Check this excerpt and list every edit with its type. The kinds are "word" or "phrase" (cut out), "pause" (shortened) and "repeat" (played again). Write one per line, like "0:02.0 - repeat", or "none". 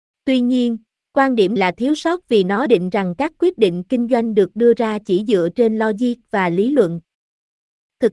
0:01.6 - word
0:02.7 - word

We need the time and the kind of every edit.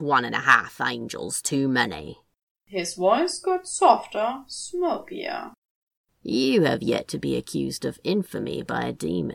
none

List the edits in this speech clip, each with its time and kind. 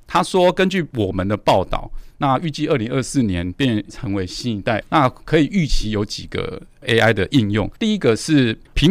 0:03.9 - word
0:04.8 - phrase
0:07.8 - pause

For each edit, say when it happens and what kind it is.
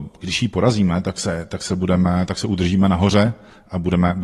none

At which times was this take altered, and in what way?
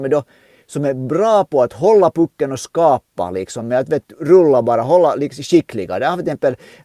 none

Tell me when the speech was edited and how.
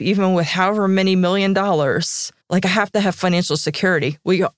0:02.4 - pause

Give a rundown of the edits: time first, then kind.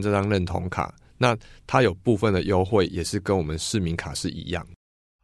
none

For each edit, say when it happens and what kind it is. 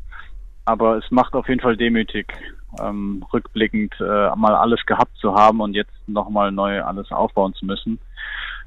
none

